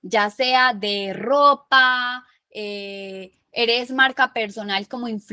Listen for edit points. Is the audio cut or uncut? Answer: uncut